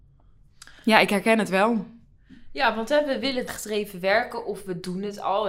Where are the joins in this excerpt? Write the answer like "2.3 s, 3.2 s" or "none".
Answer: 3.5 s